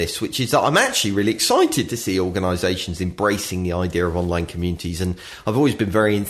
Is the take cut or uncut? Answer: uncut